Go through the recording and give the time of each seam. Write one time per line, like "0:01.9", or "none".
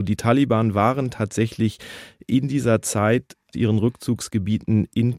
0:03.5